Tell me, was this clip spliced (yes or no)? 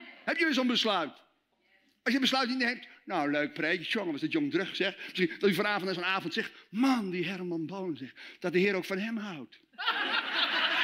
no